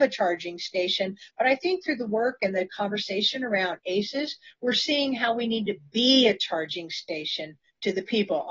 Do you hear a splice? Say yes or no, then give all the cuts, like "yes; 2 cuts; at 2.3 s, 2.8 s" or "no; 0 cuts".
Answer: no; 0 cuts